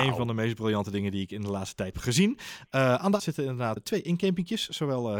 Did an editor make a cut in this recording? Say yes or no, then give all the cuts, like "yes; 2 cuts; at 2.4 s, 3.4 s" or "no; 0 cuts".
yes; 3 cuts; at 1.9 s, 3.2 s, 3.8 s